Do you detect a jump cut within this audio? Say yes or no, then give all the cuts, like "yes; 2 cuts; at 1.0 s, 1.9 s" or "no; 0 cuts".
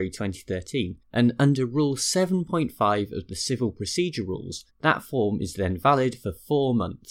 yes; 2 cuts; at 1.0 s, 4.7 s